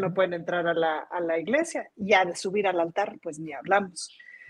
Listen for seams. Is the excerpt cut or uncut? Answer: uncut